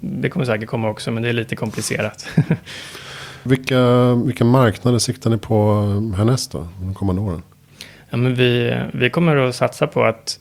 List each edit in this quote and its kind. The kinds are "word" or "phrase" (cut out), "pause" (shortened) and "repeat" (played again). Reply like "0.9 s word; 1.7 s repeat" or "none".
none